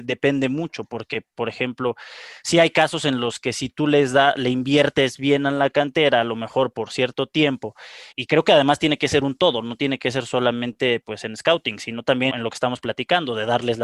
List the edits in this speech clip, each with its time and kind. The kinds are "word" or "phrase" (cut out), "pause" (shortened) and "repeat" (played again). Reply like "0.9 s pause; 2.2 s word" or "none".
8.1 s word; 12.3 s word